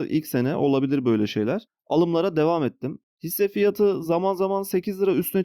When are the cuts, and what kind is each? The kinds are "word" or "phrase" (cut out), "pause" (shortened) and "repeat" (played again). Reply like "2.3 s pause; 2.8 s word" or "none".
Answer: none